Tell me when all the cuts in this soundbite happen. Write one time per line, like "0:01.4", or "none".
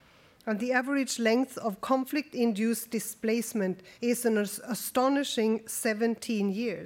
0:03.9